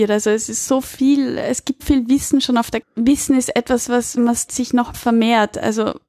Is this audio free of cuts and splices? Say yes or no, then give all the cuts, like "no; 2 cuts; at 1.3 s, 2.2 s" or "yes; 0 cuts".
no; 5 cuts; at 1.8 s, 2.8 s, 4.2 s, 4.5 s, 4.9 s